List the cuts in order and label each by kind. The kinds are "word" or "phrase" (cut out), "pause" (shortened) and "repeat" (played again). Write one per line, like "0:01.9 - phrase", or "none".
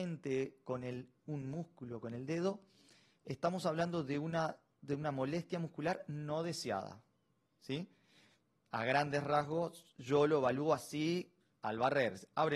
none